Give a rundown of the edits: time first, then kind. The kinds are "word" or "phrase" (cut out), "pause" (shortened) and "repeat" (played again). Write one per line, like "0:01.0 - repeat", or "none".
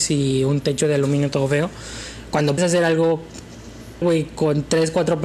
0:02.6 - word
0:04.0 - word

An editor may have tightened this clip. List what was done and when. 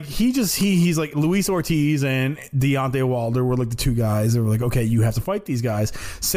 none

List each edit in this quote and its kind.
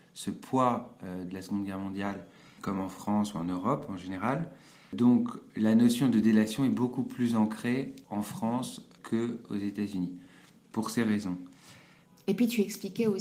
none

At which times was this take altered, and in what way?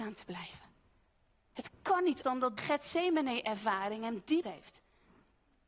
0:02.2 - word
0:02.6 - word
0:04.4 - word

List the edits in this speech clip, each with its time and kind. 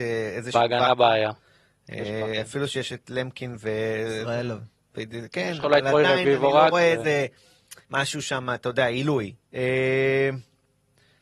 0:07.8 - pause
0:09.4 - pause

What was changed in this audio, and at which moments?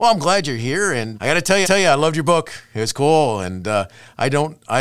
0:01.1 - word
0:01.6 - repeat

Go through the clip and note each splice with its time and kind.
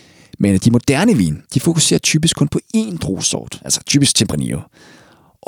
0:01.4 - pause

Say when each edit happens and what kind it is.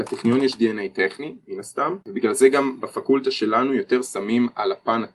0:02.0 - pause

